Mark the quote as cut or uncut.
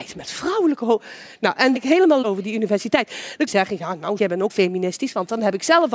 cut